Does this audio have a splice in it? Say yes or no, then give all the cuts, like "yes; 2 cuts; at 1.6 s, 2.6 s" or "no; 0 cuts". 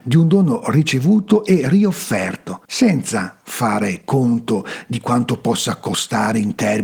yes; 1 cut; at 2.6 s